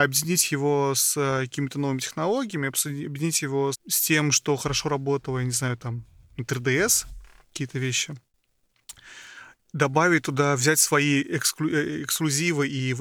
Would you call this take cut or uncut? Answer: cut